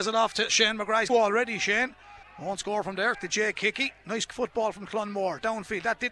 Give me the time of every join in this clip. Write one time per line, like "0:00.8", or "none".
0:01.1
0:02.2
0:03.1
0:04.3